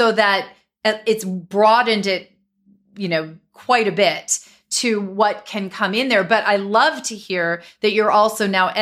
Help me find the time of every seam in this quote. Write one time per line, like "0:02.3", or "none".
none

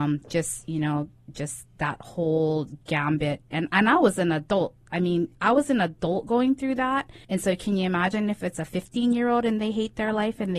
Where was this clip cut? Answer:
0:05.4
0:07.2

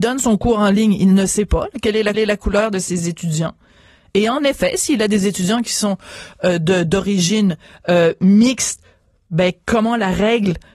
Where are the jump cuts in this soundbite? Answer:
0:02.1

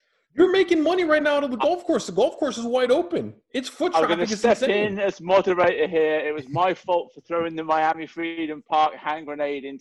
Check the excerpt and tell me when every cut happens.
none

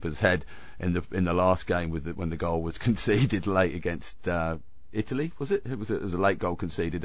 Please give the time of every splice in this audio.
none

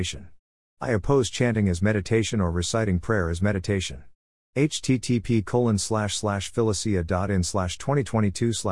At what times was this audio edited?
none

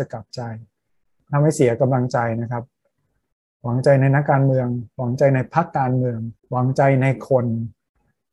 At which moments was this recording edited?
0:06.4

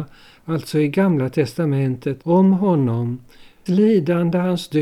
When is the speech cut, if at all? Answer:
0:02.2
0:03.7

